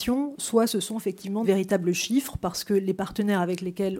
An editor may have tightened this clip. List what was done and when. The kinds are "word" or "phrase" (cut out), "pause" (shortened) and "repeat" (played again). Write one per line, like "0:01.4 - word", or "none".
0:01.4 - word